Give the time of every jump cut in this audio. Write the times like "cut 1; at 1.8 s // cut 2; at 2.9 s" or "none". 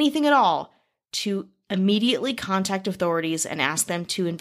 none